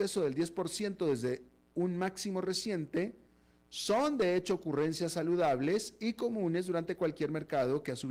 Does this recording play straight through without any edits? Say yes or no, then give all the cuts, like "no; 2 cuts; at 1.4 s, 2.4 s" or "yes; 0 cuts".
yes; 0 cuts